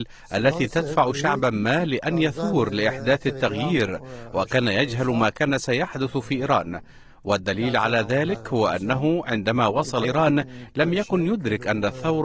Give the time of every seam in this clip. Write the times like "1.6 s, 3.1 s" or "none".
10.0 s